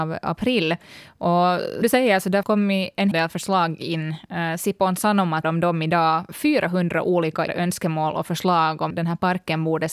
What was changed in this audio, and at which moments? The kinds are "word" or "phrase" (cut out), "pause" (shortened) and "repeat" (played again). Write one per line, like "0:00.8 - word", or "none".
0:01.8 - word
0:02.4 - word
0:03.1 - word
0:05.4 - word
0:07.5 - word
0:08.9 - word